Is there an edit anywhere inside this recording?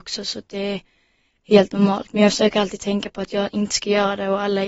no; 0 cuts

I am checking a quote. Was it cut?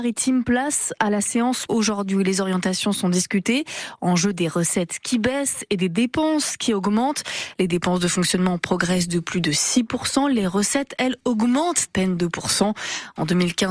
yes; 2 cuts; at 1.7 s, 11.9 s

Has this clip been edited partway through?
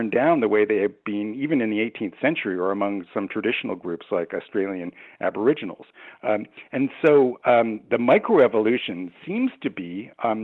no; 0 cuts

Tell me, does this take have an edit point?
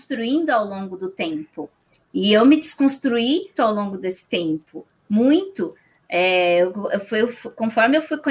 yes; 1 cut; at 3.5 s

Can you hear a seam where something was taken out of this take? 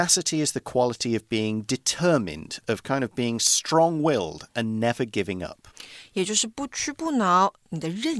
no; 0 cuts

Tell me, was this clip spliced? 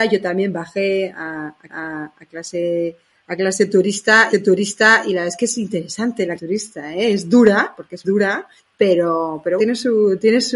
yes; 6 cuts; at 1.7 s, 4.3 s, 6.4 s, 8.0 s, 8.6 s, 9.6 s

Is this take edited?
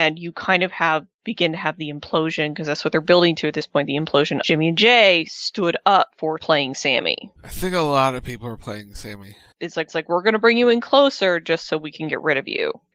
yes; 4 cuts; at 4.4 s, 6.4 s, 9.5 s, 9.9 s

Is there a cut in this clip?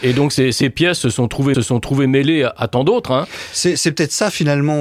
yes; 1 cut; at 1.5 s

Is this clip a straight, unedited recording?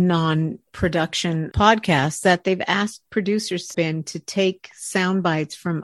no; 3 cuts; at 1.5 s, 2.2 s, 3.7 s

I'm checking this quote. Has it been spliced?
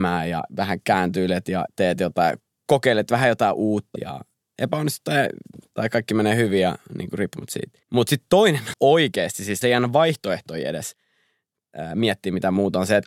yes; 4 cuts; at 4.0 s, 7.8 s, 8.7 s, 9.6 s

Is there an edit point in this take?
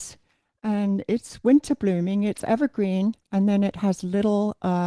no; 0 cuts

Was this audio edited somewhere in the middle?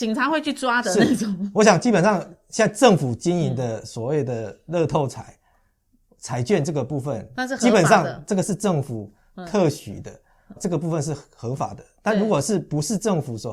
yes; 1 cut; at 10.6 s

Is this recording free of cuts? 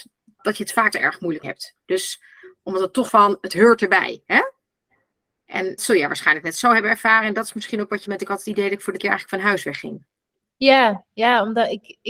no; 6 cuts; at 0.9 s, 1.4 s, 3.1 s, 5.8 s, 8.0 s, 9.0 s

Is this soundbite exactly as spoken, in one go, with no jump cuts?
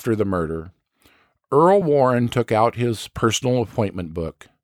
yes; 0 cuts

